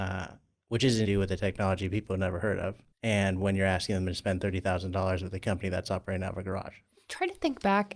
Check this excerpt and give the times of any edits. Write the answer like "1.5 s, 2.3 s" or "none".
1.0 s, 2.9 s